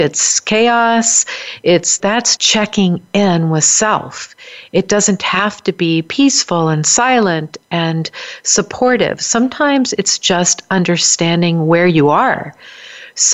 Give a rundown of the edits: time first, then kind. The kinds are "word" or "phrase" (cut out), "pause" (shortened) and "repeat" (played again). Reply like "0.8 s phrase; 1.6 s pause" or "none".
2.0 s phrase; 2.4 s phrase